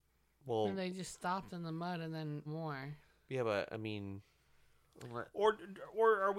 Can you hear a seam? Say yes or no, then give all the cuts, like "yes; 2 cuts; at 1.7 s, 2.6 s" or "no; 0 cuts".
yes; 1 cut; at 2.5 s